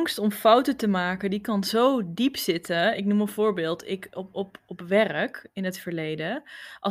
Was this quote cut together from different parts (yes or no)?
no